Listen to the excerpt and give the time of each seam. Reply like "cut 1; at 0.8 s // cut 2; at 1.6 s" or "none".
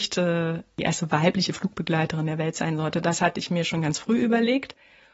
none